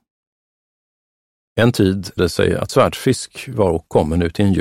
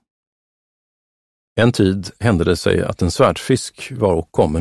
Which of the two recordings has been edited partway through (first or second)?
first